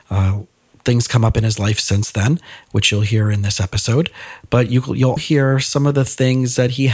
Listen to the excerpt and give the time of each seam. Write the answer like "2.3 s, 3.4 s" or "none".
5.2 s